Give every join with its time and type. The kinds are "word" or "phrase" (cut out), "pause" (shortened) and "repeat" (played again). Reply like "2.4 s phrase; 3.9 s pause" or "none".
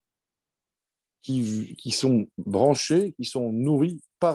2.5 s word